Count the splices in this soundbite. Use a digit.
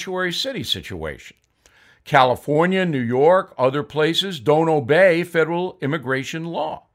0